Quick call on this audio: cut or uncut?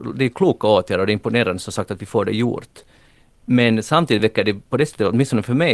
uncut